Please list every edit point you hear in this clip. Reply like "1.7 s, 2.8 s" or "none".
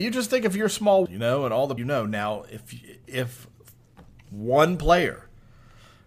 1.1 s, 1.8 s, 3.0 s